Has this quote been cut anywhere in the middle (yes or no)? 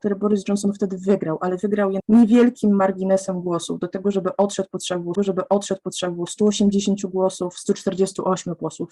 yes